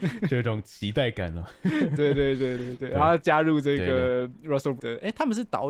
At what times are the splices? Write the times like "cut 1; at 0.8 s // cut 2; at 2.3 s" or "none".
cut 1; at 4.8 s